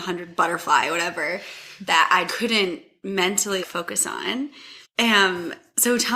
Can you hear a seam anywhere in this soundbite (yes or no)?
yes